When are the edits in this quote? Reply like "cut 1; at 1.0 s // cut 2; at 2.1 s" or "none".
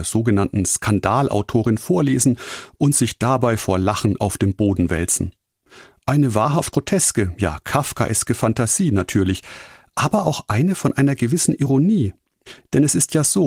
none